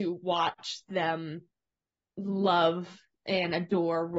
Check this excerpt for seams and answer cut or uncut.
uncut